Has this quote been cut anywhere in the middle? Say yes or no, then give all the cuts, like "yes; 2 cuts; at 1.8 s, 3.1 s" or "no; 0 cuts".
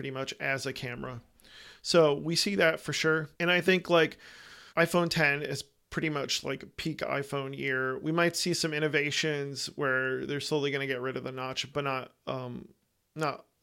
yes; 2 cuts; at 3.3 s, 4.7 s